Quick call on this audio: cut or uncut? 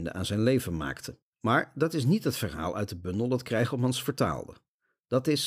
cut